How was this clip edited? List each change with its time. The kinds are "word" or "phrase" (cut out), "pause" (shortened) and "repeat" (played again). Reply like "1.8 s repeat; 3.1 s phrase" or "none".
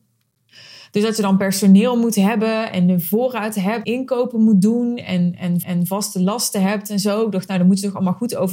3.8 s word; 5.6 s repeat